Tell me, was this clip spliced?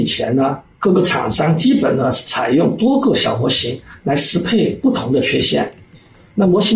no; 0 cuts

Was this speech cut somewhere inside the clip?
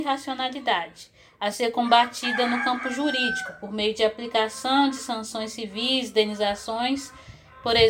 no; 0 cuts

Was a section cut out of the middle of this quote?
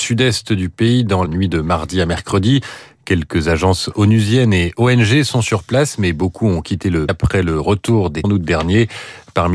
yes; 3 cuts; at 1.3 s, 7.1 s, 8.2 s

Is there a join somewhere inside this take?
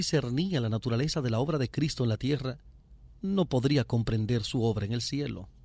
no; 0 cuts

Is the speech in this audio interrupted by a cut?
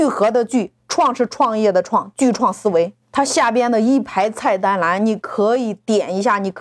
yes; 1 cut; at 3.0 s

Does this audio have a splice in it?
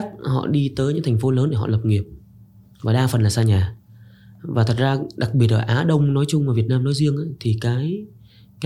no; 0 cuts

